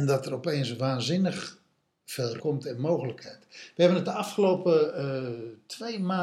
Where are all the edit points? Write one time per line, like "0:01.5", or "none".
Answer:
0:02.4